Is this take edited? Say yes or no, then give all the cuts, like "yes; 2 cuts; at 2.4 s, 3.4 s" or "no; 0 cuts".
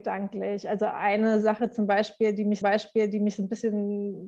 yes; 1 cut; at 2.6 s